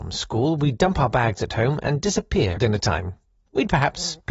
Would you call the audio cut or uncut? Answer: cut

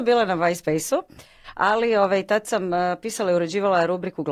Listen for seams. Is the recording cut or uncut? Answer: uncut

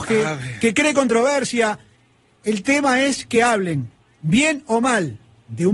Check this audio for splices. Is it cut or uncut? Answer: uncut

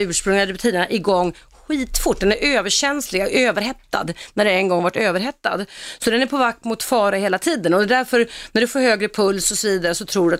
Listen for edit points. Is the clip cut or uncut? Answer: uncut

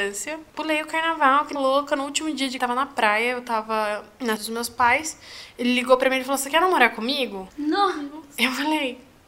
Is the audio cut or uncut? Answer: cut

